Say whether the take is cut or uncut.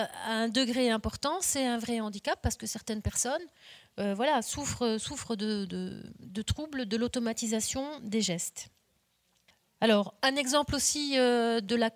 uncut